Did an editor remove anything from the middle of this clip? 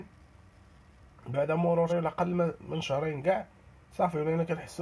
yes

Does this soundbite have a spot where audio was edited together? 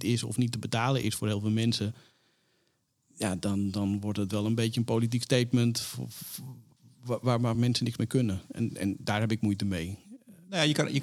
no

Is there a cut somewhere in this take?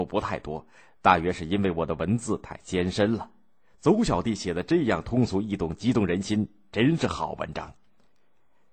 no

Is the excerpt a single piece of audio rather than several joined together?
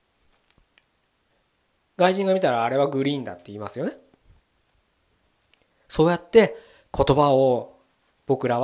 yes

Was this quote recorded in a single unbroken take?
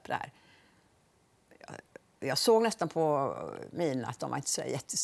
yes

